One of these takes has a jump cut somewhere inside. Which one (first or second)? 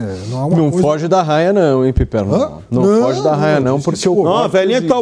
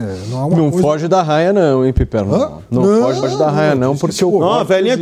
second